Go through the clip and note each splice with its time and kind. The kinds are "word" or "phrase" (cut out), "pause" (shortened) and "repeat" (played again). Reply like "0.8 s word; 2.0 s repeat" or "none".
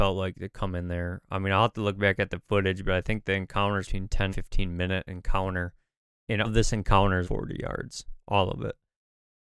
3.8 s word; 4.3 s word; 6.4 s word; 7.2 s word